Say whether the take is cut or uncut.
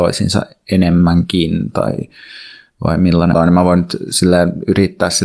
cut